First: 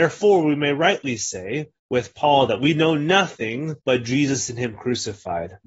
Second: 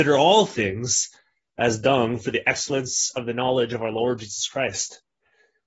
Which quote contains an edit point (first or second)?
first